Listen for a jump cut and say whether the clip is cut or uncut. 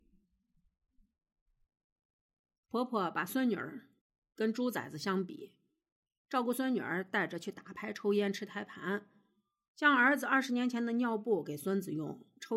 cut